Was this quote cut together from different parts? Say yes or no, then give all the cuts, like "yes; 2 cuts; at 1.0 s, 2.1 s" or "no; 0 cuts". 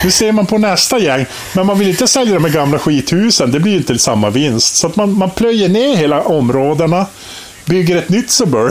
no; 0 cuts